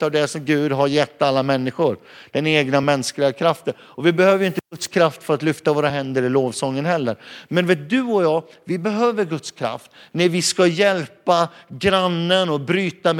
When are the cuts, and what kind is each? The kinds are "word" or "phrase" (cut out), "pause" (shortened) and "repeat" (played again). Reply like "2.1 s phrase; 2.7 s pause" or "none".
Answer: none